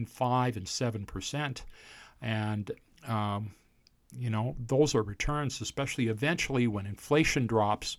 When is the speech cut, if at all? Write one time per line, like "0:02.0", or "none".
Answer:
0:02.9
0:05.1